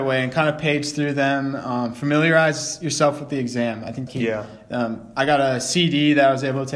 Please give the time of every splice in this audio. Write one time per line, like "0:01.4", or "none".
0:04.1